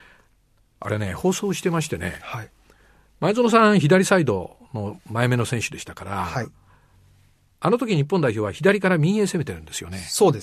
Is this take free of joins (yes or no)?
yes